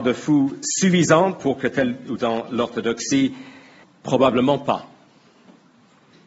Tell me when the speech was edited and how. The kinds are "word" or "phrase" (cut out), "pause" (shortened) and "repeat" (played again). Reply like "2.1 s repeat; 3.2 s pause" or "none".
2.2 s phrase; 3.8 s pause